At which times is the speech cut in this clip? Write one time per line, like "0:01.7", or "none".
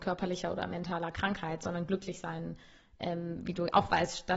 none